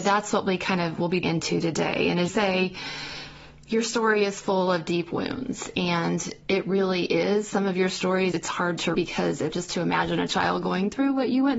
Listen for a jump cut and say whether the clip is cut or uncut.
cut